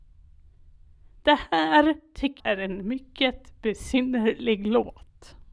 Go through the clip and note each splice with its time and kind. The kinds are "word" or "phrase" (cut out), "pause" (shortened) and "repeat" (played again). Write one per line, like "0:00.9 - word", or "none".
0:02.4 - word